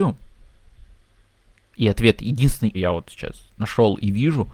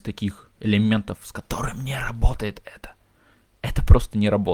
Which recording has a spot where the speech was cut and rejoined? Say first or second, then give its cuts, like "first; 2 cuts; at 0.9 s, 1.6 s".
first; 2 cuts; at 1.5 s, 2.7 s